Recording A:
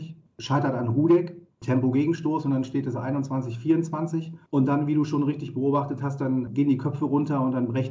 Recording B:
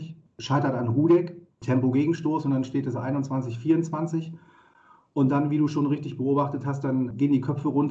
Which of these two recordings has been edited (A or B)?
A